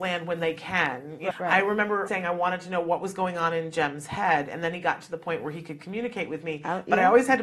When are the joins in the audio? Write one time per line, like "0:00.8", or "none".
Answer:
0:01.3
0:02.1